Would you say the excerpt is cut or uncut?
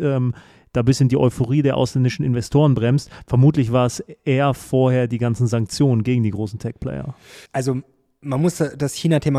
cut